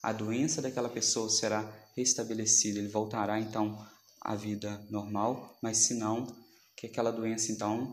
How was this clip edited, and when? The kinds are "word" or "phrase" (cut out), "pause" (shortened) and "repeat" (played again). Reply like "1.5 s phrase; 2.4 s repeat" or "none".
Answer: none